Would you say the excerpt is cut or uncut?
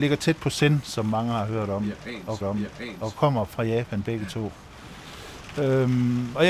cut